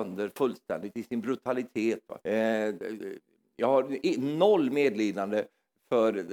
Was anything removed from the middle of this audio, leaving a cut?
yes; 1 cut; at 2.2 s

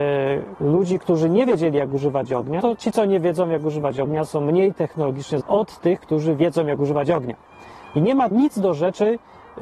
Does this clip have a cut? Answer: yes; 3 cuts; at 2.6 s, 5.4 s, 8.3 s

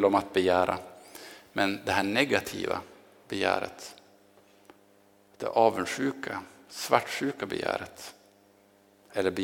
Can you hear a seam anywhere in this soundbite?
no; 0 cuts

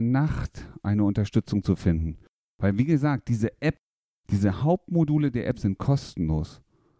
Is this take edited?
no; 0 cuts

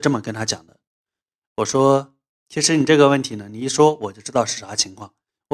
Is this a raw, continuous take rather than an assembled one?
yes; 0 cuts

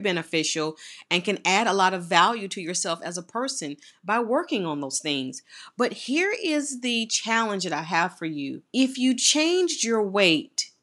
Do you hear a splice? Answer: yes; 1 cut; at 8.7 s

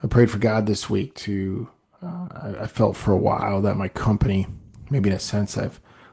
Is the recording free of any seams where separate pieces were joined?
yes; 0 cuts

